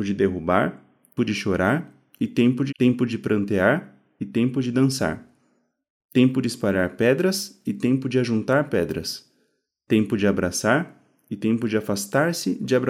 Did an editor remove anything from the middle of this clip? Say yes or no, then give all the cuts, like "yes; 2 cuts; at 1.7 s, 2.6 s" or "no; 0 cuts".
yes; 2 cuts; at 1.2 s, 2.7 s